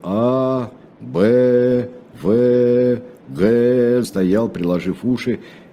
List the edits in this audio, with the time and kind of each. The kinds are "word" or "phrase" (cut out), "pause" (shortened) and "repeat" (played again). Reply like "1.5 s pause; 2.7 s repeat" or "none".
4.0 s word